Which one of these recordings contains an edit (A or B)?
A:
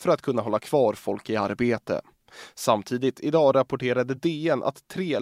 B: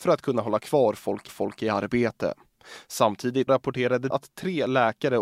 B